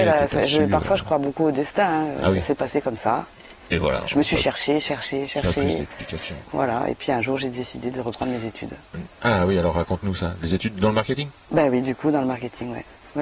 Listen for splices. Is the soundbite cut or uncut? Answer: uncut